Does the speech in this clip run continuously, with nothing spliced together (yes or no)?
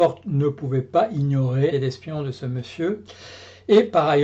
no